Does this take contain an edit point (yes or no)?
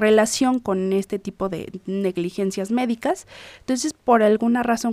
no